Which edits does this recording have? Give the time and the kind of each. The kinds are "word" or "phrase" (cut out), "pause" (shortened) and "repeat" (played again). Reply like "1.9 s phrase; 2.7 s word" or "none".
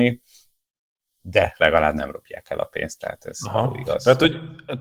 none